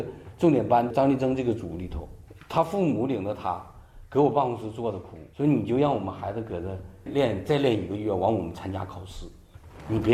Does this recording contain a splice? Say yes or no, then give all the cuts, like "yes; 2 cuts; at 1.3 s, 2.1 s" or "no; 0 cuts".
yes; 1 cut; at 5.3 s